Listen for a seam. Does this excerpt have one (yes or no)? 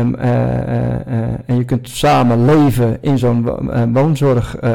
no